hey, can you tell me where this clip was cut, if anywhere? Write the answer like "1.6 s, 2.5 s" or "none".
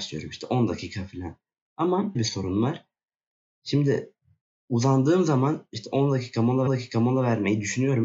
2.1 s, 6.7 s